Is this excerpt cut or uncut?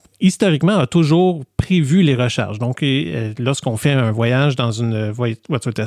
uncut